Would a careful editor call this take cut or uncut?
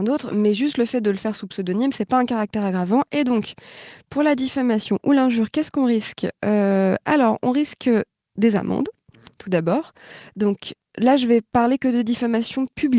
uncut